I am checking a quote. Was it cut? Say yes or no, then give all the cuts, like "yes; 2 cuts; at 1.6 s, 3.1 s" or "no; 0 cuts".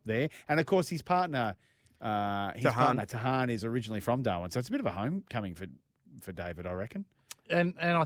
no; 0 cuts